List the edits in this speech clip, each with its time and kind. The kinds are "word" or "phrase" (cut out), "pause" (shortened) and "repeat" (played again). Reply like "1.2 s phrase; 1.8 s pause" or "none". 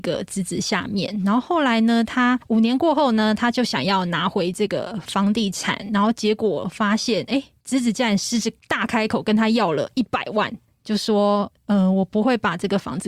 none